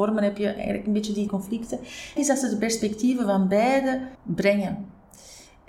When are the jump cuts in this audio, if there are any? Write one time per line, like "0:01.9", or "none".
0:01.3
0:02.2
0:04.2